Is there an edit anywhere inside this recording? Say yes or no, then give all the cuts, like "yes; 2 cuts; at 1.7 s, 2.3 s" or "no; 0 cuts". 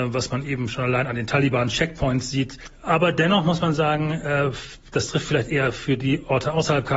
no; 0 cuts